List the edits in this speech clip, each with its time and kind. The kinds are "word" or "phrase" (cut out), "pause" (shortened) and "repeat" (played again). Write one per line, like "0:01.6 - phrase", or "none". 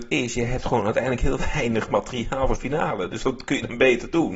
0:02.6 - word

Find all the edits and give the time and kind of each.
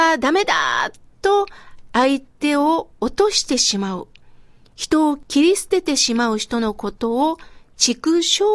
none

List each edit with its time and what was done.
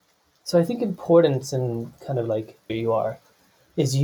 0:02.7 - phrase

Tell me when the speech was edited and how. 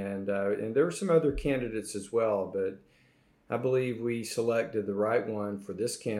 none

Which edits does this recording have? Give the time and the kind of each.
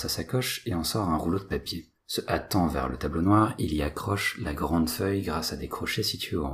0:02.0 - pause

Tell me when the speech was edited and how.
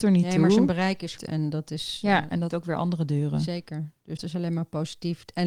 0:01.2 - word
0:02.5 - word
0:04.2 - word

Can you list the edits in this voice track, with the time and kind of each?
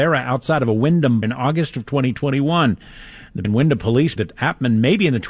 0:01.2 - word
0:03.4 - word
0:04.2 - word

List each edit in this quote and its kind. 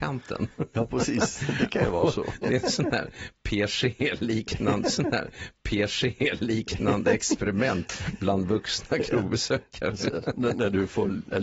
0:04.8 - repeat

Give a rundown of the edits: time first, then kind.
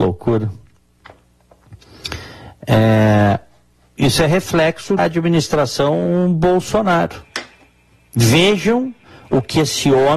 0:05.0 - word

